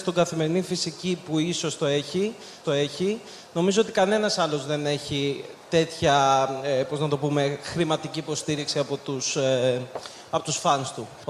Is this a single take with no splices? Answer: no; 1 cut; at 2.6 s

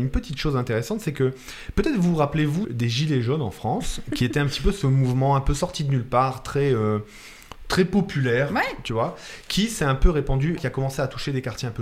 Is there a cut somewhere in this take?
yes; 2 cuts; at 2.6 s, 10.6 s

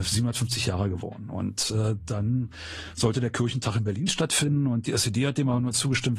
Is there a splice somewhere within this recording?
no; 0 cuts

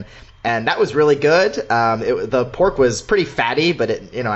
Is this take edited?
no; 0 cuts

